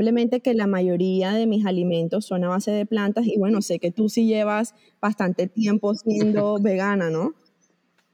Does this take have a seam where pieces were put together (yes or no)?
no